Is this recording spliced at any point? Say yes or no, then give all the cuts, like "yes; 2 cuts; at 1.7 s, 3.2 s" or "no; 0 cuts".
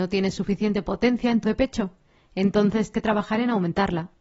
yes; 2 cuts; at 1.4 s, 2.9 s